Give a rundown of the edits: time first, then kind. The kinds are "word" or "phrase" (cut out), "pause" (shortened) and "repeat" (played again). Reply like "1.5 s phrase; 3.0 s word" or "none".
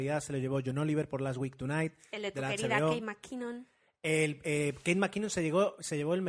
none